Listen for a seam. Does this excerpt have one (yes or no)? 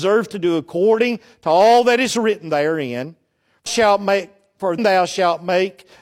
yes